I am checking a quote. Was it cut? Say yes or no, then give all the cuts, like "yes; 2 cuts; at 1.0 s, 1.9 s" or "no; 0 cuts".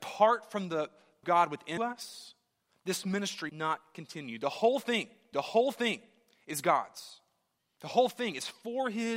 yes; 5 cuts; at 1.2 s, 1.8 s, 3.5 s, 5.3 s, 7.6 s